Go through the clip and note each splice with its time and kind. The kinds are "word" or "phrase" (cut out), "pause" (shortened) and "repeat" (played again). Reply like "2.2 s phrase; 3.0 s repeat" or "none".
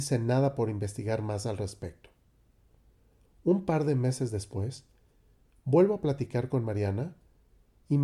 none